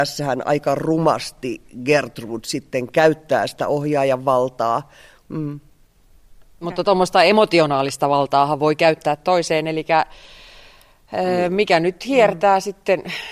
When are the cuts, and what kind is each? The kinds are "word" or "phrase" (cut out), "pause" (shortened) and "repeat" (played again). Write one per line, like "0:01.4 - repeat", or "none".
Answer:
none